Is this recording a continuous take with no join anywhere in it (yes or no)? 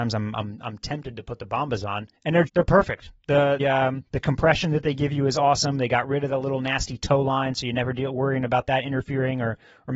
no